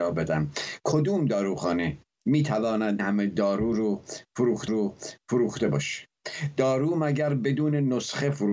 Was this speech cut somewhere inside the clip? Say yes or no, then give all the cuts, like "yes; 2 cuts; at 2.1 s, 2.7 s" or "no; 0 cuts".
yes; 3 cuts; at 2.1 s, 3.0 s, 4.7 s